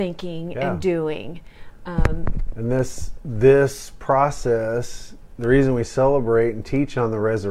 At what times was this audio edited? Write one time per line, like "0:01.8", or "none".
none